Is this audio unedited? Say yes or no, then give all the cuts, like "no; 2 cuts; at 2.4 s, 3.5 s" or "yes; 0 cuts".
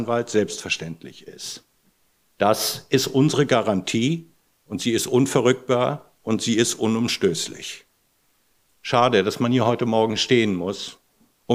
yes; 0 cuts